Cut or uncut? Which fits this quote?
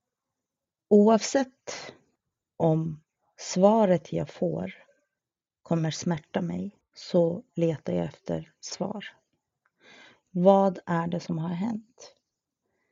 uncut